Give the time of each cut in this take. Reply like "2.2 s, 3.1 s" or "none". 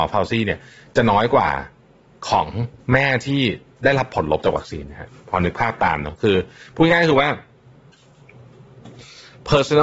none